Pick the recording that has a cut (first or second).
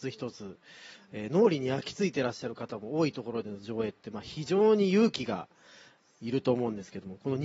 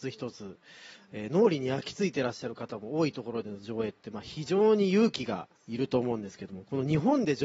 second